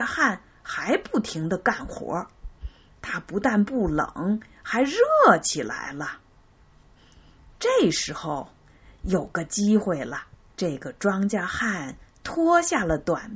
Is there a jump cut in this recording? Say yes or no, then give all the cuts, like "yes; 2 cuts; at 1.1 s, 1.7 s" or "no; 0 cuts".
yes; 1 cut; at 10.5 s